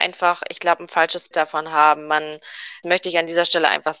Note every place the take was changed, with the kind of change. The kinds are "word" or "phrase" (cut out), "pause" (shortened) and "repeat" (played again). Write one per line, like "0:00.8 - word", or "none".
0:01.3 - word
0:02.8 - word